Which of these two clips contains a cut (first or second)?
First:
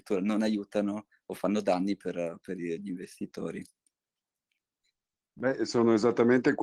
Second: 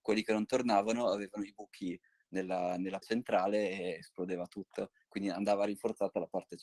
second